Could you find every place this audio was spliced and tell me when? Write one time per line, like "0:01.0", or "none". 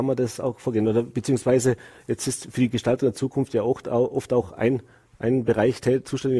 none